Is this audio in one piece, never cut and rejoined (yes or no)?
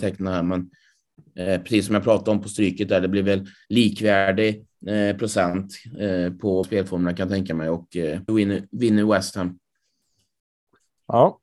no